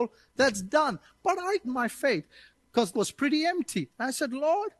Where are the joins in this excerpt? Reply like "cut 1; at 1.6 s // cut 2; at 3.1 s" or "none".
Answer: cut 1; at 1.6 s // cut 2; at 2.9 s